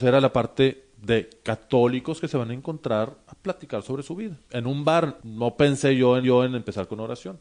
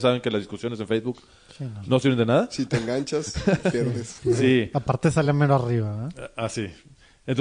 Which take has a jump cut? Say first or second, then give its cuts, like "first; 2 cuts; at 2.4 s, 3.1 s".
first; 3 cuts; at 4.4 s, 5.2 s, 6.2 s